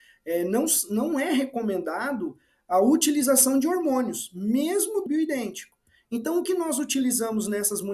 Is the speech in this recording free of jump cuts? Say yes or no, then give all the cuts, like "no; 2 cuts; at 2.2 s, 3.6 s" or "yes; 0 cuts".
no; 3 cuts; at 1.1 s, 5.1 s, 6.5 s